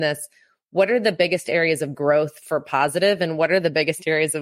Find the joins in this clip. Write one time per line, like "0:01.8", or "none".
none